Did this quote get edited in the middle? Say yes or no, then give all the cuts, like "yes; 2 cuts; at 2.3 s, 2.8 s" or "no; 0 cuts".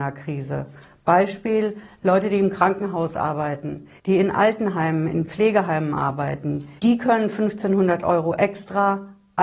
yes; 2 cuts; at 4.0 s, 6.8 s